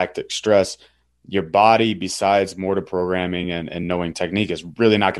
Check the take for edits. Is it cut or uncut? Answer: uncut